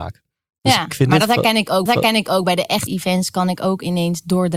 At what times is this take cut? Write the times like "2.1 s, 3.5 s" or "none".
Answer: 1.9 s, 2.9 s